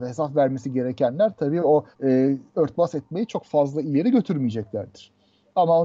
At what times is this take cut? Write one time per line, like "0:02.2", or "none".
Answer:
0:01.9